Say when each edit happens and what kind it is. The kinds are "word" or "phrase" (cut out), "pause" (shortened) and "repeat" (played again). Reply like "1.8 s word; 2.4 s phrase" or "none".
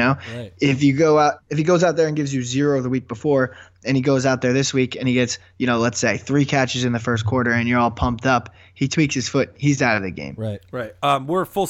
none